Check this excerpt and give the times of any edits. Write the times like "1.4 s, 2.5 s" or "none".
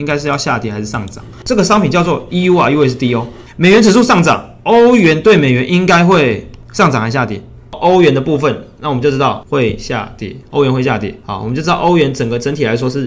none